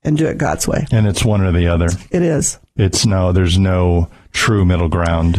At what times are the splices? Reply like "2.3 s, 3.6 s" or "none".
none